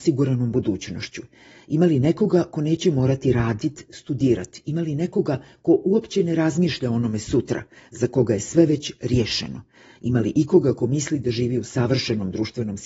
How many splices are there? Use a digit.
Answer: 0